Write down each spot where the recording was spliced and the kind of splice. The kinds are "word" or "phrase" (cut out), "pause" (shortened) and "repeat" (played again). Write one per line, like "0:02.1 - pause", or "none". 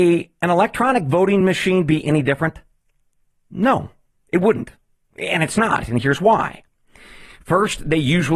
none